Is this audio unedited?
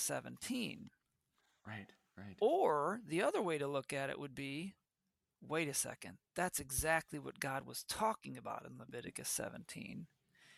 yes; 0 cuts

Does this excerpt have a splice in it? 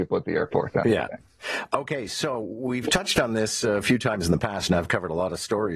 no; 0 cuts

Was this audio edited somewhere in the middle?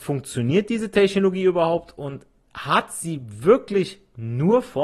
no; 0 cuts

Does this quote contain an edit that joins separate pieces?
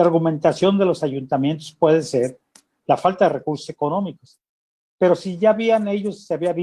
no; 0 cuts

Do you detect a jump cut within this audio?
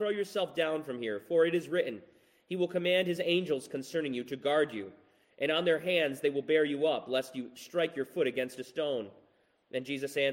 no; 0 cuts

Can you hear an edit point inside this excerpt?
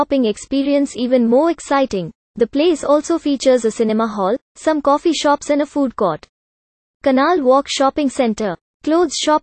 no; 0 cuts

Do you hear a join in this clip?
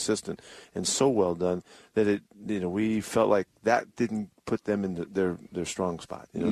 no; 0 cuts

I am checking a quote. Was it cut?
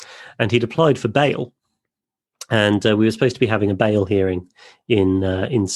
no; 0 cuts

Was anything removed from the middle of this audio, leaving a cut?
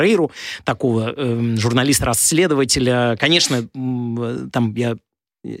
no; 0 cuts

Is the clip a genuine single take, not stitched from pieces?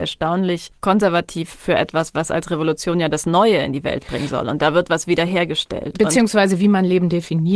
yes; 0 cuts

